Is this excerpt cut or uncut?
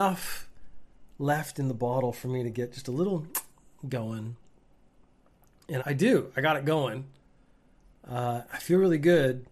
cut